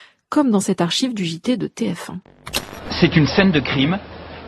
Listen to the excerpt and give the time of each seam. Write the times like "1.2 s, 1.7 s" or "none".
none